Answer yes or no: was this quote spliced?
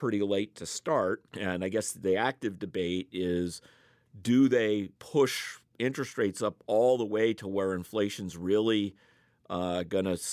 yes